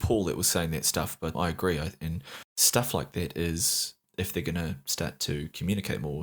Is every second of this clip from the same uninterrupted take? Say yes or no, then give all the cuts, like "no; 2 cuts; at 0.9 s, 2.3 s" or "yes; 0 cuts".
no; 2 cuts; at 1.3 s, 2.5 s